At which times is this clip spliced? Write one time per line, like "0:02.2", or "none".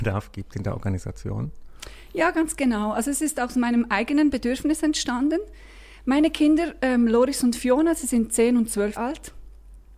0:09.0